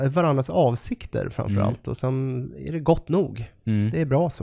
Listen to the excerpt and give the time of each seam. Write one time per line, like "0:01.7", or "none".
none